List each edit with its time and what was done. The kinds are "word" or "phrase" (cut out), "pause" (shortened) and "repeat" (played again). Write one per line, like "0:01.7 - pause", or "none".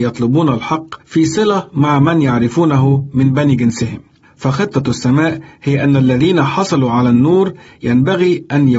0:01.0 - pause